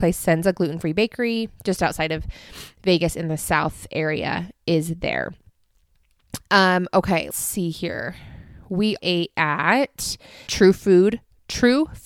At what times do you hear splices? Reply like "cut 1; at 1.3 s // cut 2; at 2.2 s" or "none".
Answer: cut 1; at 7.3 s // cut 2; at 9.0 s // cut 3; at 10.5 s